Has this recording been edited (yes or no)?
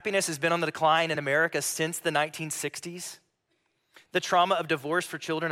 no